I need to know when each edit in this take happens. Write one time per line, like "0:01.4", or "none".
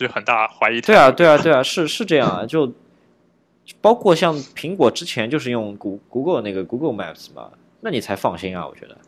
none